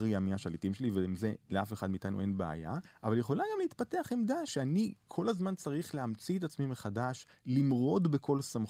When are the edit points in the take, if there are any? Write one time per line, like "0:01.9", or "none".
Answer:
0:01.4